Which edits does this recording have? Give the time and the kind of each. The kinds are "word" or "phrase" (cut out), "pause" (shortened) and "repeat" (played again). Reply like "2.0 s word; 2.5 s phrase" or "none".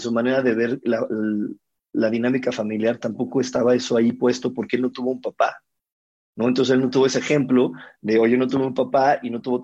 none